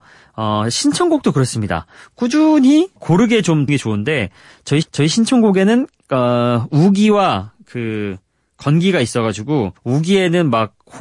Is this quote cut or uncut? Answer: cut